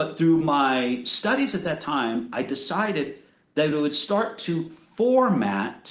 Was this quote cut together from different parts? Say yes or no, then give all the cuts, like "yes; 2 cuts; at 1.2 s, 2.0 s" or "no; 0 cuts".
no; 0 cuts